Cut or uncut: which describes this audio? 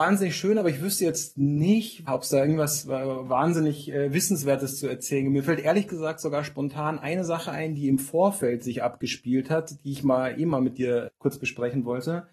cut